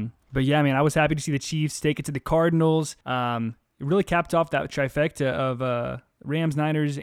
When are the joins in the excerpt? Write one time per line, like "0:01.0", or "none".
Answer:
0:03.0